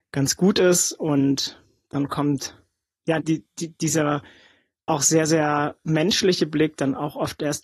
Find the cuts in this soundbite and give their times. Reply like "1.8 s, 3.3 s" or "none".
3.2 s